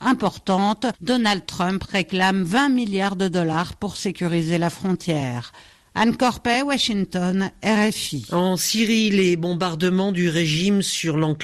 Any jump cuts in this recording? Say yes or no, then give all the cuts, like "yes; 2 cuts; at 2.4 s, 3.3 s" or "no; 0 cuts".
no; 0 cuts